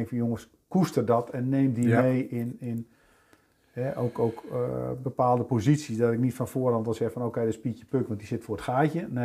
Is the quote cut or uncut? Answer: uncut